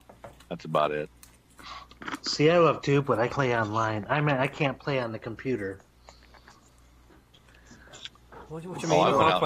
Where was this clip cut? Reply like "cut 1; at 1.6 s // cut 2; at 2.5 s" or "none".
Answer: cut 1; at 2.8 s // cut 2; at 3.3 s